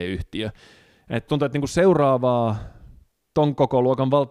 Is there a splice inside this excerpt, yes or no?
yes